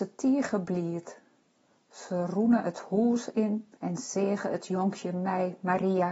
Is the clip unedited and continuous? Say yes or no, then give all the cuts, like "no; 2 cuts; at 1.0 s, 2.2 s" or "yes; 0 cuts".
no; 1 cut; at 3.8 s